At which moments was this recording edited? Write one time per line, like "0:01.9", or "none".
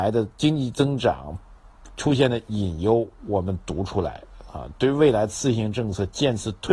none